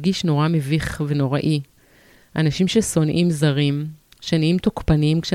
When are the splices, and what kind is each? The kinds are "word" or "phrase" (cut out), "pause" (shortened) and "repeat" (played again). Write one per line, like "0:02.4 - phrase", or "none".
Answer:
none